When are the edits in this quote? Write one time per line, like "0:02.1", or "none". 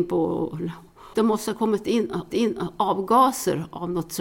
0:01.1
0:02.3